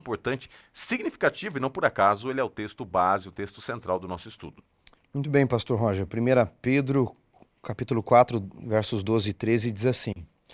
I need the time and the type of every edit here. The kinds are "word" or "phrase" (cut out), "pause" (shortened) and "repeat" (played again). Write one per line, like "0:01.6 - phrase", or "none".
none